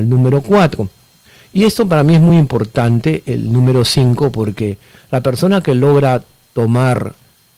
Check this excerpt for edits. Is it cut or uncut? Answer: uncut